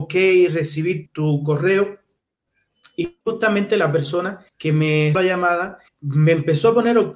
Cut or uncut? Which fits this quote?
cut